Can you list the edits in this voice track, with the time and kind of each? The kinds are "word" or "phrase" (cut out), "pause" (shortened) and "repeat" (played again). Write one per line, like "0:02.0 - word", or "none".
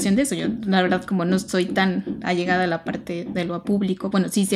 none